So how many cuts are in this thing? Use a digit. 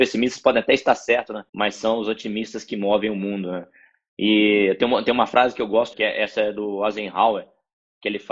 2